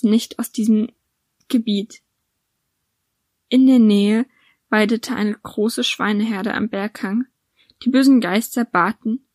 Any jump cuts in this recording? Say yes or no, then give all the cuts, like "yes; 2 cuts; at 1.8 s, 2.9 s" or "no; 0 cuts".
no; 0 cuts